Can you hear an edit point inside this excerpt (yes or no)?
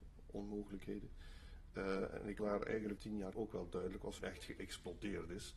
yes